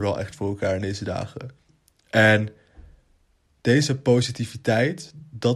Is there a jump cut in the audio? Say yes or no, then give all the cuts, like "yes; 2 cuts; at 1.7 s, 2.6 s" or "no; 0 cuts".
no; 0 cuts